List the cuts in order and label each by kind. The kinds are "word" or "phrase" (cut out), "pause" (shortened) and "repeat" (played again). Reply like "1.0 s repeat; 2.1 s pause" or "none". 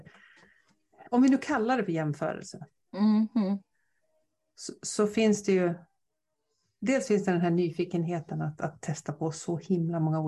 1.1 s pause